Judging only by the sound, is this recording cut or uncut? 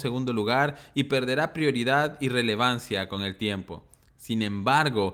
uncut